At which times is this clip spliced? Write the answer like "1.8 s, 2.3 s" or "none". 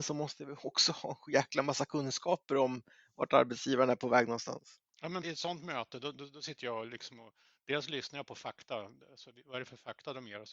5.2 s